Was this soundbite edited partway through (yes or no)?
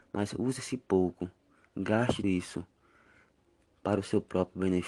yes